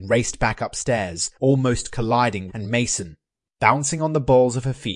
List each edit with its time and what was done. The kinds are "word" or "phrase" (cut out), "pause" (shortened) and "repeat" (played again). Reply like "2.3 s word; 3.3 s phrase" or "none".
1.3 s pause; 2.5 s phrase